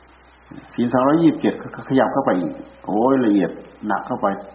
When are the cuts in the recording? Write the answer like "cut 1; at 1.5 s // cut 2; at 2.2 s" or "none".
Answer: none